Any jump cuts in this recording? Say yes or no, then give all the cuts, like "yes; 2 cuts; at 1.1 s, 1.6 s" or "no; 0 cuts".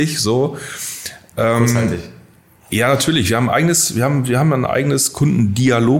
no; 0 cuts